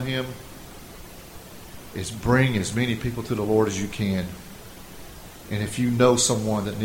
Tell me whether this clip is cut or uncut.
uncut